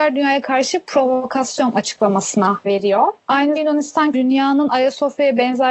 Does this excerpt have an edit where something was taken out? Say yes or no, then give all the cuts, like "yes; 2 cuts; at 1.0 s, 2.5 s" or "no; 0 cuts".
yes; 3 cuts; at 2.7 s, 3.6 s, 4.1 s